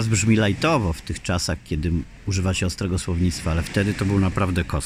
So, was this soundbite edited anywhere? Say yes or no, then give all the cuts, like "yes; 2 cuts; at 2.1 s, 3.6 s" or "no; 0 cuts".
no; 0 cuts